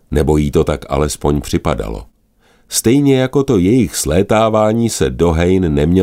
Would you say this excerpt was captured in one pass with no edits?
yes; 0 cuts

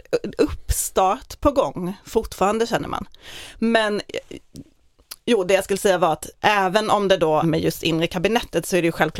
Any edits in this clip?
yes; 1 cut; at 7.4 s

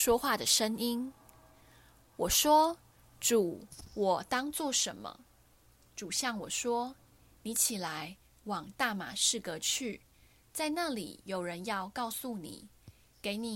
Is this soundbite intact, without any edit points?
yes; 0 cuts

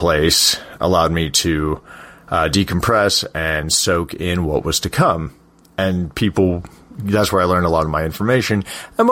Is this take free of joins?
yes; 0 cuts

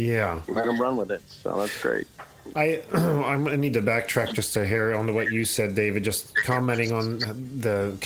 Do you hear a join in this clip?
no; 0 cuts

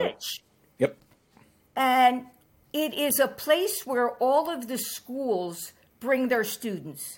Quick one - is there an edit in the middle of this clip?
no; 0 cuts

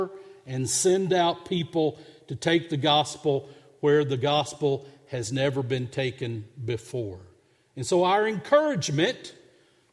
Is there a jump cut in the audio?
no; 0 cuts

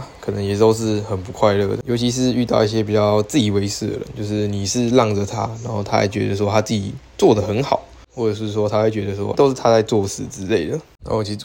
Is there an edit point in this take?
yes; 2 cuts; at 7.1 s, 9.3 s

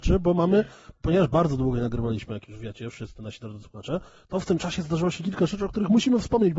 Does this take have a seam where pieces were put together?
no; 0 cuts

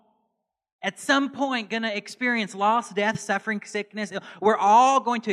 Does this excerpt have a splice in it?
no; 0 cuts

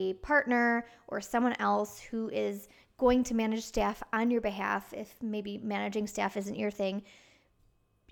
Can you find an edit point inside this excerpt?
no; 0 cuts

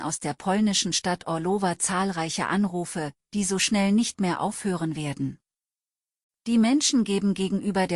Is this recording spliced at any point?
no; 0 cuts

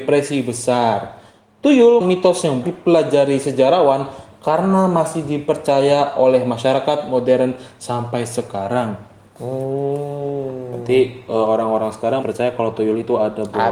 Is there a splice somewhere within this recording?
yes; 3 cuts; at 2.0 s, 2.6 s, 12.2 s

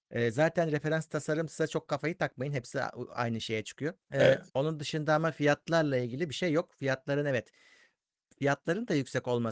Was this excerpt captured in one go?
no; 2 cuts; at 4.0 s, 4.5 s

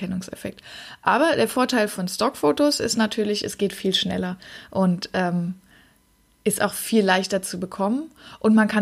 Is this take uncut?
yes; 0 cuts

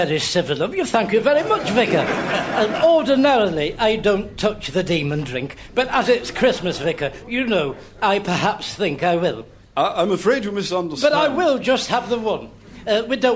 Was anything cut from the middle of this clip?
no; 0 cuts

